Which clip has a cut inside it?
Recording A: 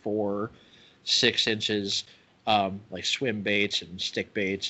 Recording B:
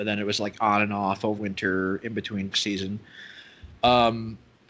B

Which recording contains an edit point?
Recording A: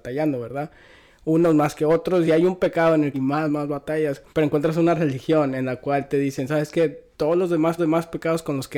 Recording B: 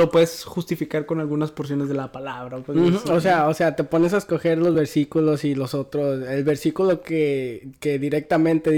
A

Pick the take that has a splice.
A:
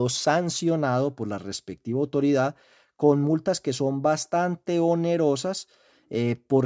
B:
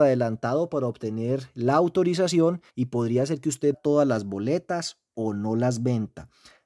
B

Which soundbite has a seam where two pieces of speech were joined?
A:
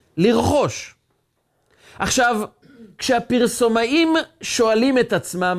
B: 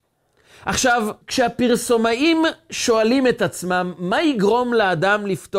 B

